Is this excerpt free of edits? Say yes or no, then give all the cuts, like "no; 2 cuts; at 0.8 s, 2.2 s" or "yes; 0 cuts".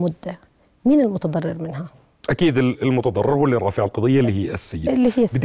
yes; 0 cuts